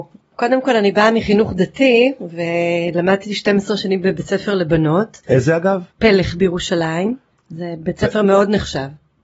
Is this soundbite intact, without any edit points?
no; 1 cut; at 5.9 s

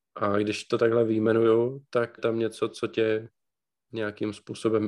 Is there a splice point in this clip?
yes; 1 cut; at 2.2 s

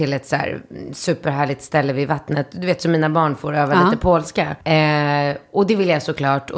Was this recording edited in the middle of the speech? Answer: yes; 1 cut; at 4.6 s

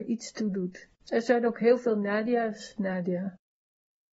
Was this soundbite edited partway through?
yes; 2 cuts; at 1.0 s, 2.8 s

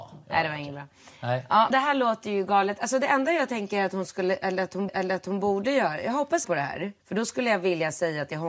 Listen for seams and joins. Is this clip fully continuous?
no; 4 cuts; at 1.7 s, 4.9 s, 6.4 s, 7.0 s

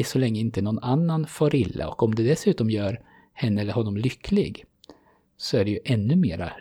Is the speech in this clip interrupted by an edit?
no; 0 cuts

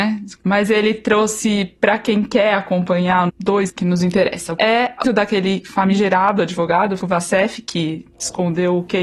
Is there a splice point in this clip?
yes; 5 cuts; at 3.3 s, 3.7 s, 4.6 s, 5.0 s, 7.0 s

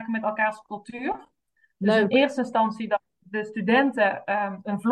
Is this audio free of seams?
yes; 0 cuts

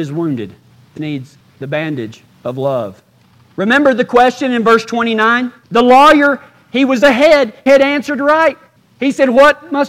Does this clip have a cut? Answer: yes; 3 cuts; at 1.0 s, 5.6 s, 7.7 s

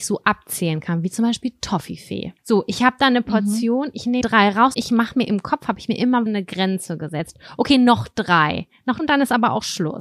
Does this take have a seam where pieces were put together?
yes; 5 cuts; at 2.4 s, 4.2 s, 4.7 s, 6.3 s, 9.0 s

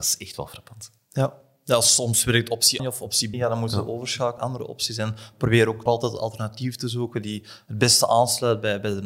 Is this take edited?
yes; 4 cuts; at 2.8 s, 3.3 s, 4.4 s, 5.9 s

